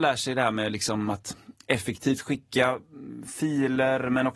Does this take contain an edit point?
no; 0 cuts

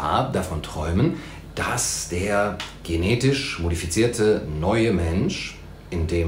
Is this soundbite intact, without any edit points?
yes; 0 cuts

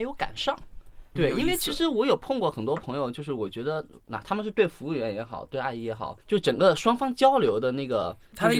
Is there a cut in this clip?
yes; 2 cuts; at 1.2 s, 6.2 s

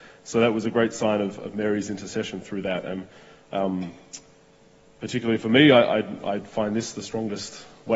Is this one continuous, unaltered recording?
yes; 0 cuts

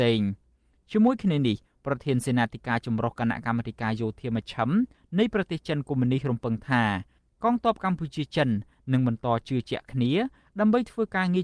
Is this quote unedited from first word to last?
yes; 0 cuts

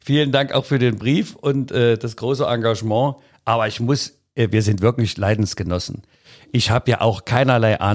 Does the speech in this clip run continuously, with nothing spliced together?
yes; 0 cuts

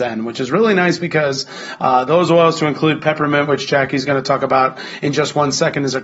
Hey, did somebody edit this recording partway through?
no; 0 cuts

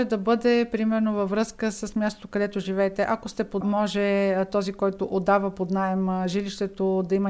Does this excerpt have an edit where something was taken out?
yes; 1 cut; at 3.6 s

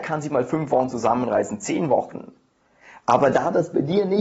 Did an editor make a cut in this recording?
no; 0 cuts

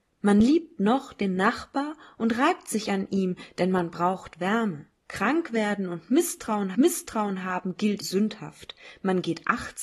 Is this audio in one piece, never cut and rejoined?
no; 3 cuts; at 4.9 s, 6.7 s, 8.0 s

